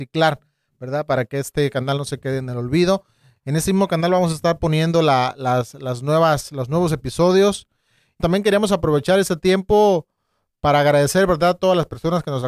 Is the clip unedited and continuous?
no; 1 cut; at 8.2 s

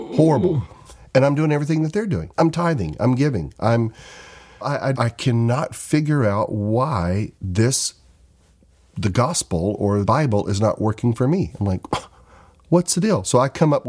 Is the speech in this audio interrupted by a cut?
yes; 5 cuts; at 2.3 s, 4.6 s, 4.9 s, 7.4 s, 10.1 s

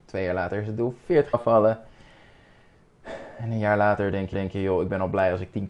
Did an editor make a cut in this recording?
yes; 2 cuts; at 1.3 s, 4.3 s

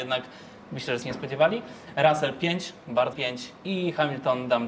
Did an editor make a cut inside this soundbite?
yes; 2 cuts; at 1.0 s, 3.1 s

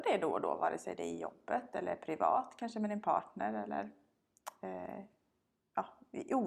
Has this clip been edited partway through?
no; 0 cuts

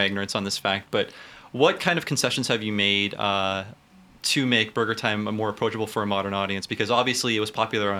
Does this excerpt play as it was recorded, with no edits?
yes; 0 cuts

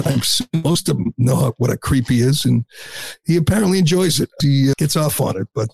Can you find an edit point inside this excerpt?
yes; 2 cuts; at 4.4 s, 4.7 s

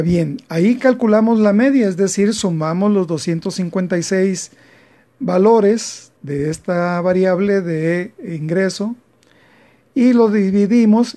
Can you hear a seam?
yes; 1 cut; at 6.2 s

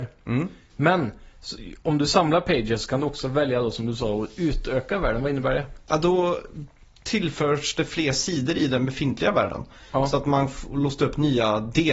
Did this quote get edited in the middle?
no; 0 cuts

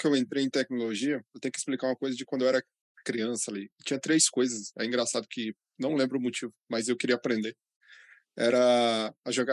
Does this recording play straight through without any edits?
yes; 0 cuts

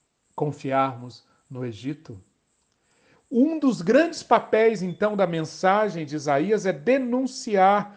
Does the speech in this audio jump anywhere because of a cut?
no; 0 cuts

